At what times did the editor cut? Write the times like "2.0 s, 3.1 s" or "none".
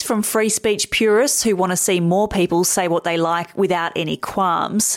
none

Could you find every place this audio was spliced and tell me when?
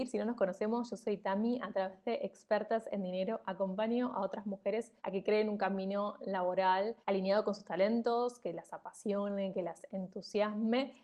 5.0 s, 7.0 s

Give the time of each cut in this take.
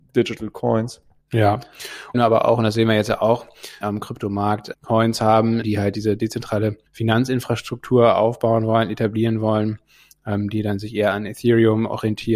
1.2 s, 2.1 s, 3.8 s, 4.7 s, 5.6 s, 6.9 s

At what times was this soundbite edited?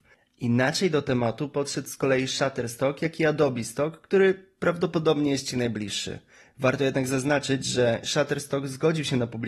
none

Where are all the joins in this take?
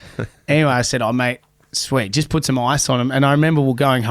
none

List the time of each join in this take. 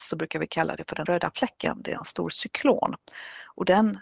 1.1 s

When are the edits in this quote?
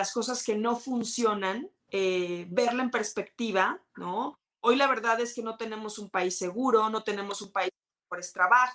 1.8 s, 3.9 s

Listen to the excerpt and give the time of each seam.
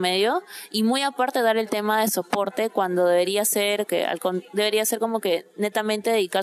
3.9 s

